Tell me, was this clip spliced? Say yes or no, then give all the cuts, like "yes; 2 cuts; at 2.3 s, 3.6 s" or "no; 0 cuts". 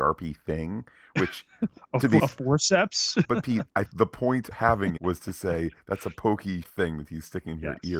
yes; 6 cuts; at 2.2 s, 3.2 s, 3.9 s, 4.5 s, 5.0 s, 6.6 s